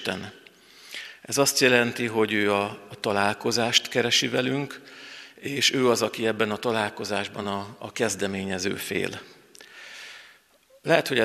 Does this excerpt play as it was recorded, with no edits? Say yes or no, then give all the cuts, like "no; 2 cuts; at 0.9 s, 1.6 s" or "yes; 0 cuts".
yes; 0 cuts